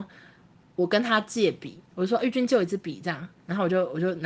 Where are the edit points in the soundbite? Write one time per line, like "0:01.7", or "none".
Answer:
0:01.9
0:03.4

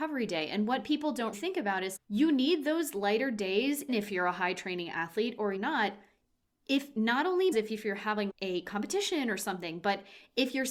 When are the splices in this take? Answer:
0:01.3
0:02.0
0:03.9
0:05.6
0:07.5
0:08.3

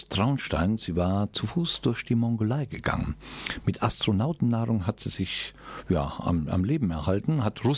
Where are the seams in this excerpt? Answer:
none

